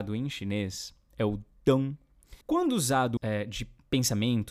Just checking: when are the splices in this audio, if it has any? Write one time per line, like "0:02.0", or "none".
0:02.4
0:03.2